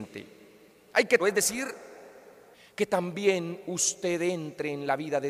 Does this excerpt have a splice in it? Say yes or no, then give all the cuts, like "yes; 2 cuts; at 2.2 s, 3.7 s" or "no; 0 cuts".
yes; 2 cuts; at 1.2 s, 2.5 s